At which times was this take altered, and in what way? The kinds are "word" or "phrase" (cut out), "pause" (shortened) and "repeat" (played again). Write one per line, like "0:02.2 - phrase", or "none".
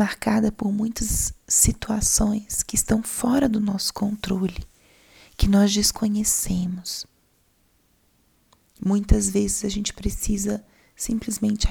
none